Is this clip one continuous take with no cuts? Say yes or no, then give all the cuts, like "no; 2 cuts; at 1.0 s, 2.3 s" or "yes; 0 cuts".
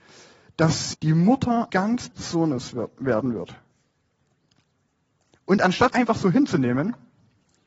no; 4 cuts; at 0.9 s, 1.7 s, 2.1 s, 5.9 s